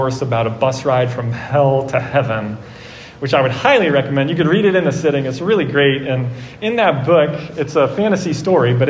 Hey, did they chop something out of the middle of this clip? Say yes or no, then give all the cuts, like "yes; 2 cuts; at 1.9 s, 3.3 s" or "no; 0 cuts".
no; 0 cuts